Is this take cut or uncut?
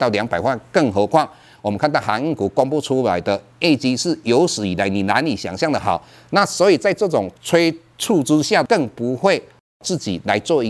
uncut